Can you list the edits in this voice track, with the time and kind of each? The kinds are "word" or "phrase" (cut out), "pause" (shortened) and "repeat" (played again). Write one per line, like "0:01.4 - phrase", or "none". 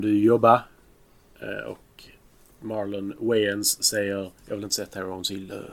none

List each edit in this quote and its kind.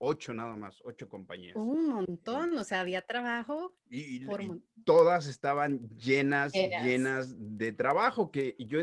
0:03.8 - pause

